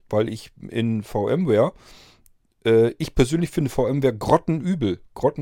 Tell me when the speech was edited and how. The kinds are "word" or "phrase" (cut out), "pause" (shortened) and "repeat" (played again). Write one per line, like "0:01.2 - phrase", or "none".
none